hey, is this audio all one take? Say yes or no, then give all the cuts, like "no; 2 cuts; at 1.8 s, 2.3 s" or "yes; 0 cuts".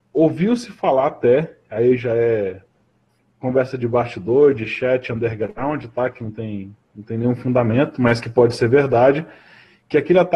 yes; 0 cuts